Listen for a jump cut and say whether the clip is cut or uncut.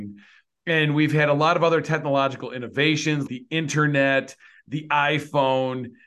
cut